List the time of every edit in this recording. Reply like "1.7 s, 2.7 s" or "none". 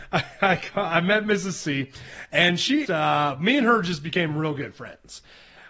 2.8 s